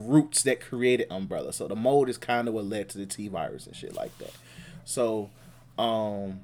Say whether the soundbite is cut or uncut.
uncut